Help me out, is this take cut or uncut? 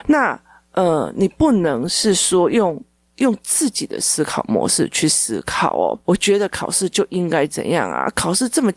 cut